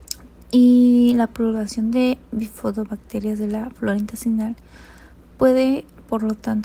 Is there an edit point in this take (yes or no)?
no